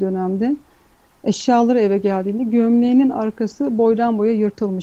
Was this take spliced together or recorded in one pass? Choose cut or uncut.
uncut